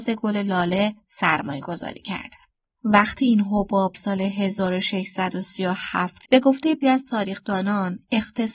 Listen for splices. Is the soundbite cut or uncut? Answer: cut